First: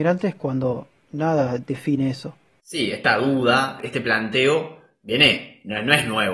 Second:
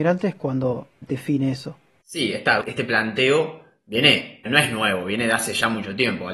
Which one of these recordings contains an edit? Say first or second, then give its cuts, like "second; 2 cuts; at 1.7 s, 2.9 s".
second; 3 cuts; at 1.0 s, 2.6 s, 4.4 s